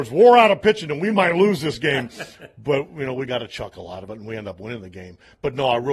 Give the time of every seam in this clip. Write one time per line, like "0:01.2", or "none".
none

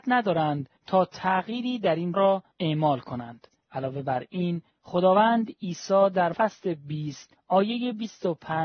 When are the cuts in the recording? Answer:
0:02.1
0:06.3

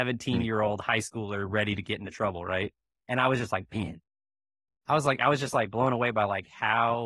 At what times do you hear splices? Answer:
none

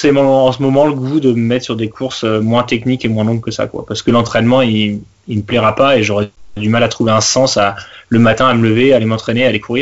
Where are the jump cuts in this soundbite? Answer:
none

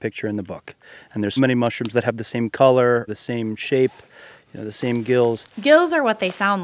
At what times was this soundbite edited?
0:01.4
0:03.1
0:05.5

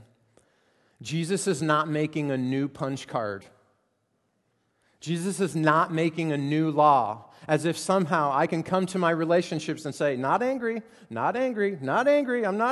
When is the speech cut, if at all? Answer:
none

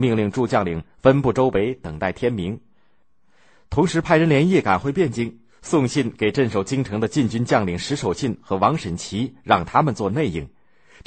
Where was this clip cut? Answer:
none

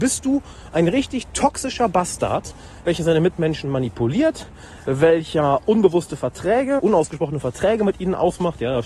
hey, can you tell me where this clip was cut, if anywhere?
0:06.8

